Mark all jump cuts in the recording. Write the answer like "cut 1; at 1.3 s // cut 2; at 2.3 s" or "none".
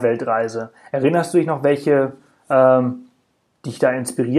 none

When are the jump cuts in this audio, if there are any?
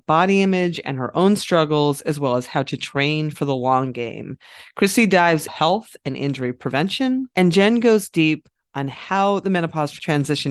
cut 1; at 5.5 s // cut 2; at 7.3 s

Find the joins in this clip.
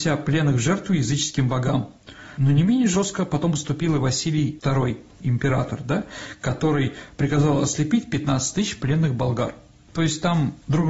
none

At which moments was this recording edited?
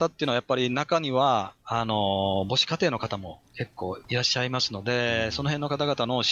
cut 1; at 4.0 s

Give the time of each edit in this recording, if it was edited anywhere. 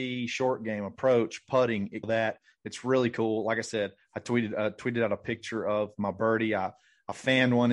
cut 1; at 2.0 s

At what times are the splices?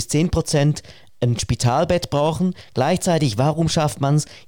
none

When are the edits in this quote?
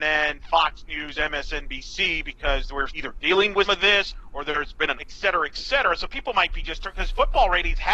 cut 1; at 2.9 s // cut 2; at 3.6 s // cut 3; at 4.9 s

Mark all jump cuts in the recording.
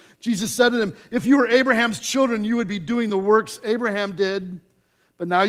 none

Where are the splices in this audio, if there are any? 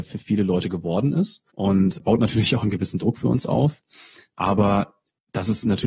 cut 1; at 1.5 s

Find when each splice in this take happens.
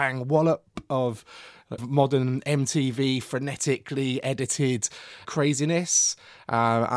cut 1; at 1.8 s // cut 2; at 5.2 s

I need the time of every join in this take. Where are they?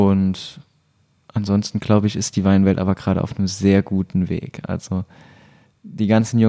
none

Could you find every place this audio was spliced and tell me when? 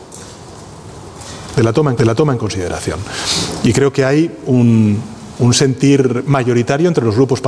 cut 1; at 2.0 s

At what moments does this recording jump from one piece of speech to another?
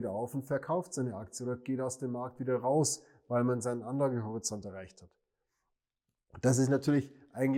none

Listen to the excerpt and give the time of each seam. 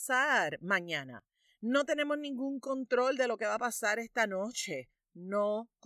none

